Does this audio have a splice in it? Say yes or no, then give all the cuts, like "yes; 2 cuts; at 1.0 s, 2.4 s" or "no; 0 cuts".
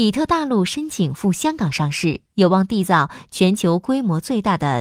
yes; 1 cut; at 2.3 s